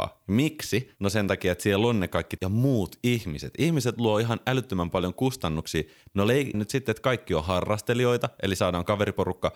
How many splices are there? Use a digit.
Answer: 2